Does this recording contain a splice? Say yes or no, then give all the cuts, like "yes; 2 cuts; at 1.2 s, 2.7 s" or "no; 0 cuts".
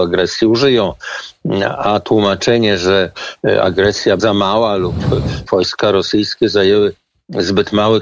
yes; 2 cuts; at 4.2 s, 5.5 s